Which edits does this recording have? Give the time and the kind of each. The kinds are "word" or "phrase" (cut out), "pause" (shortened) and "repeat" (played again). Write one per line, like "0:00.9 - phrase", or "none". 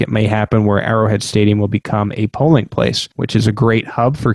0:03.1 - pause